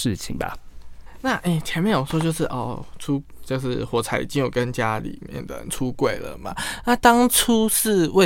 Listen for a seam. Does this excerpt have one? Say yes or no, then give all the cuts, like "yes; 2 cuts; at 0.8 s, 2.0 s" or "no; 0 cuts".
no; 0 cuts